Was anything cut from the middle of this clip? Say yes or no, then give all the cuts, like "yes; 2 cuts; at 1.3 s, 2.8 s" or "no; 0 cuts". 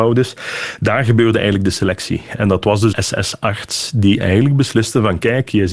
yes; 1 cut; at 2.9 s